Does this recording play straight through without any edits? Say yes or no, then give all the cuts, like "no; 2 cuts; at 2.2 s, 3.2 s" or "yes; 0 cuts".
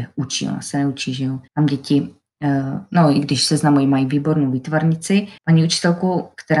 no; 2 cuts; at 1.5 s, 5.4 s